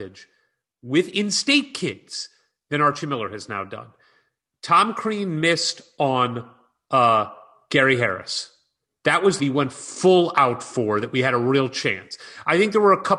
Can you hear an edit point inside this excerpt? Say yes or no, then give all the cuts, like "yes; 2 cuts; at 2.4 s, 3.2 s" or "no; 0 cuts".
yes; 1 cut; at 9.4 s